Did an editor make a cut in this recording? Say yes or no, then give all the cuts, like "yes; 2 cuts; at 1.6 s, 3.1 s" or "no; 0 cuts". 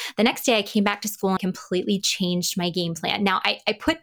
yes; 1 cut; at 1.4 s